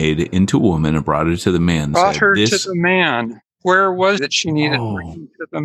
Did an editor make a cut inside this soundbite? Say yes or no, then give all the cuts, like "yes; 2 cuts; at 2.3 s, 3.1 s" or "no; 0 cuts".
yes; 3 cuts; at 1.9 s, 3.5 s, 4.2 s